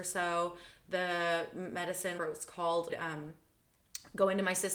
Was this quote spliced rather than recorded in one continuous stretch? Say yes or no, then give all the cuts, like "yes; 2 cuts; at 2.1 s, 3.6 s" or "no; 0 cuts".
yes; 2 cuts; at 2.2 s, 2.9 s